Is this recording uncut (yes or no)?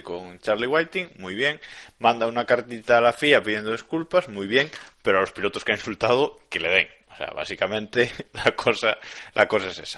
yes